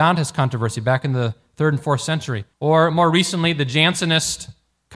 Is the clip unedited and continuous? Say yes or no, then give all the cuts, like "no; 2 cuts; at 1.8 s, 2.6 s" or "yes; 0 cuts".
no; 1 cut; at 2.5 s